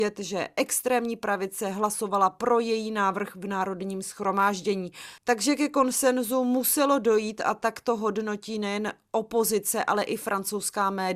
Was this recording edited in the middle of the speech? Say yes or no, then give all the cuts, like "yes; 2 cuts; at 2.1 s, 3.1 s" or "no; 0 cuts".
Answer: no; 0 cuts